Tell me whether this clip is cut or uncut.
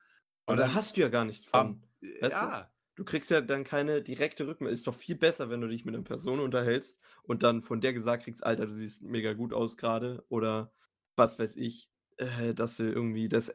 uncut